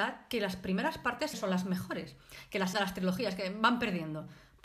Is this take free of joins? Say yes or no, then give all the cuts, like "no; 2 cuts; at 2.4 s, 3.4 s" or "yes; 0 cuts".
no; 2 cuts; at 1.3 s, 2.7 s